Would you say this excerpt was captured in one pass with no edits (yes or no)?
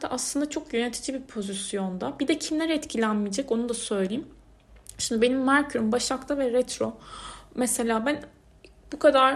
yes